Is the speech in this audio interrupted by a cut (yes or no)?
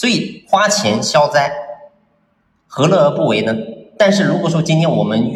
no